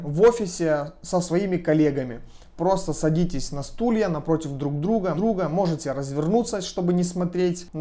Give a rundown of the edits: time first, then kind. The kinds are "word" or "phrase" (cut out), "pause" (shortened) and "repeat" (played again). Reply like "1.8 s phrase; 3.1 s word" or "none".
5.2 s repeat